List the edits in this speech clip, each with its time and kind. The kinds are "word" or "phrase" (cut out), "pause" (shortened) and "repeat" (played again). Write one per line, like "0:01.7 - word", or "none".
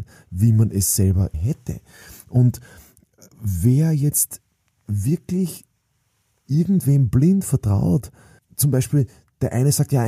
0:01.3 - word